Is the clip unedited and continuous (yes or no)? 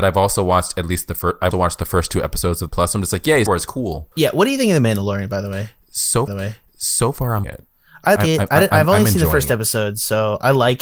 no